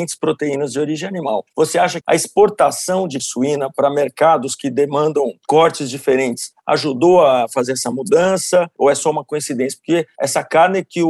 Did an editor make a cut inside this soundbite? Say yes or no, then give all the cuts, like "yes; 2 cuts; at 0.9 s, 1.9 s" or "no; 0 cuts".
yes; 2 cuts; at 2.0 s, 3.2 s